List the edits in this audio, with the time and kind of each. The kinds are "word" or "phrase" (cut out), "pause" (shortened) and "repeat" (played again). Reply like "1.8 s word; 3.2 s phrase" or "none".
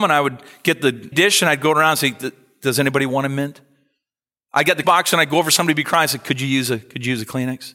1.1 s word; 4.8 s word

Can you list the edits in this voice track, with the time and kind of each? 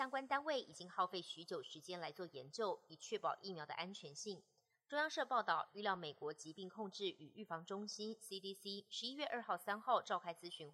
none

